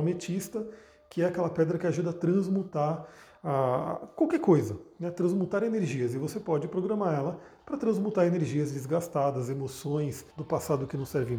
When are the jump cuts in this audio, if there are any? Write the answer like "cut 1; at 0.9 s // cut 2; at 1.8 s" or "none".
cut 1; at 10.3 s